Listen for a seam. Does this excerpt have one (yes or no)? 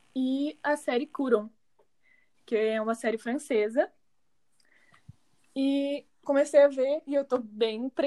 yes